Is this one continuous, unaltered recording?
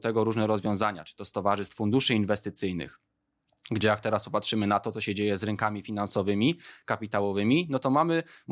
yes; 0 cuts

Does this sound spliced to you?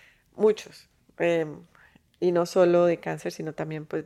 no; 0 cuts

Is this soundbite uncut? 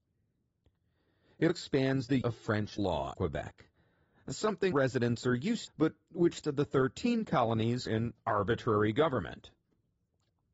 no; 8 cuts; at 1.5 s, 2.2 s, 2.8 s, 3.1 s, 4.7 s, 5.7 s, 6.4 s, 7.9 s

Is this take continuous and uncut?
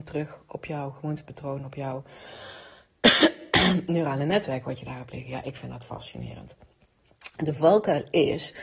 yes; 0 cuts

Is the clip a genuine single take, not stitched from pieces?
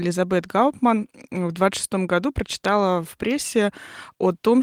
yes; 0 cuts

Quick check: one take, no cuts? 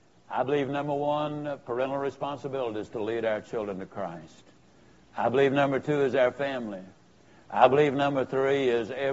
yes; 0 cuts

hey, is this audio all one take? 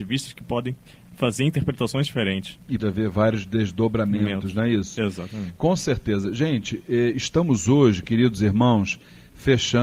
no; 1 cut; at 2.8 s

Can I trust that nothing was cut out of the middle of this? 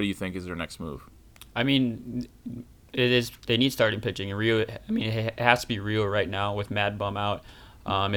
yes; 0 cuts

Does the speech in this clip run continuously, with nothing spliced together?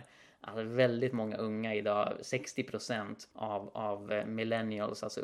no; 1 cut; at 3.3 s

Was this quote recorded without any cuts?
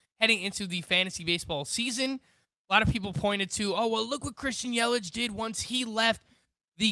yes; 0 cuts

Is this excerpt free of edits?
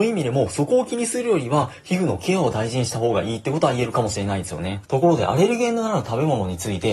no; 1 cut; at 4.8 s

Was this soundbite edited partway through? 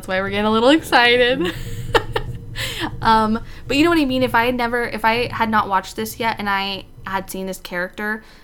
no; 0 cuts

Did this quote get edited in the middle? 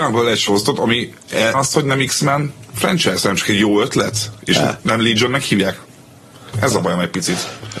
yes; 1 cut; at 1.5 s

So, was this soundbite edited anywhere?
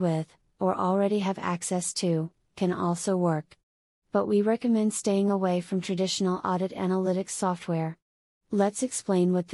no; 0 cuts

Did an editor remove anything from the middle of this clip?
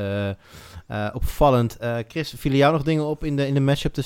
no; 0 cuts

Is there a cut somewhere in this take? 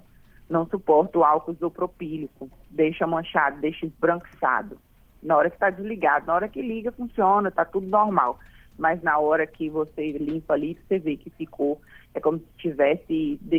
no; 0 cuts

